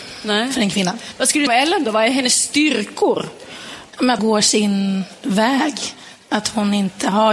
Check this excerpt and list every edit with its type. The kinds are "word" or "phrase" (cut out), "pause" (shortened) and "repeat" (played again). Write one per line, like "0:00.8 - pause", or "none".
0:01.5 - phrase
0:02.1 - phrase
0:04.2 - word